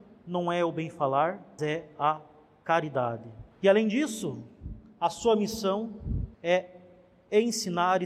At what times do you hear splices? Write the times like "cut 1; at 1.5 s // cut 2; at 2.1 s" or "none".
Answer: cut 1; at 1.6 s // cut 2; at 3.5 s // cut 3; at 6.3 s